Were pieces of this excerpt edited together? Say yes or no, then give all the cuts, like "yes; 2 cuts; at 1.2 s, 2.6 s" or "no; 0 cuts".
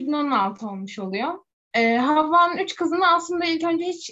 yes; 1 cut; at 1.5 s